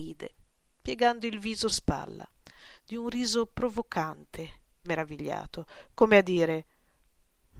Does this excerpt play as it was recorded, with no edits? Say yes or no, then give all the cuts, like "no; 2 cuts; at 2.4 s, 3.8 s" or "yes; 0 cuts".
no; 2 cuts; at 1.7 s, 4.8 s